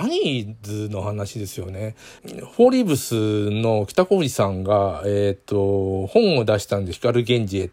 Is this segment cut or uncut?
uncut